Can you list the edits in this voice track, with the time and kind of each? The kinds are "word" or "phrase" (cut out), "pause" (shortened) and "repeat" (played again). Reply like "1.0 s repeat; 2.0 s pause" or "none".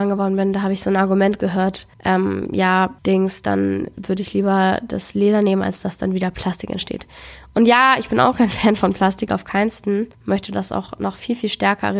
1.9 s pause; 3.0 s pause; 10.1 s pause

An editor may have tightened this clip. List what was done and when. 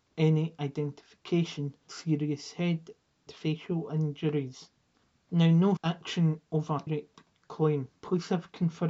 1.9 s word; 3.3 s word; 5.0 s pause; 5.8 s word; 6.9 s word

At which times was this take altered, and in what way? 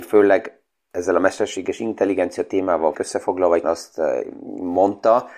2.9 s word; 3.6 s word

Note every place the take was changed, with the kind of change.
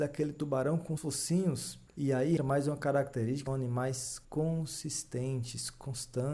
1.0 s word; 1.9 s pause; 2.4 s word; 3.5 s word; 4.2 s pause

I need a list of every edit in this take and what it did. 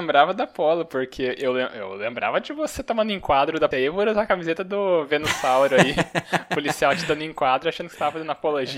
3.7 s word

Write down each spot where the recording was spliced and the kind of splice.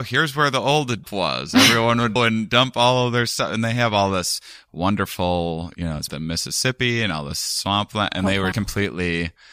1.0 s word; 2.2 s phrase; 6.1 s word; 8.5 s word

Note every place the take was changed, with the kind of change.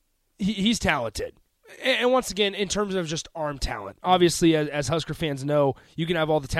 none

